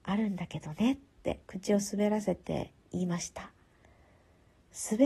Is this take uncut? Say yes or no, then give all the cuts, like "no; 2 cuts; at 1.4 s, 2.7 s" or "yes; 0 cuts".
no; 2 cuts; at 1.4 s, 2.8 s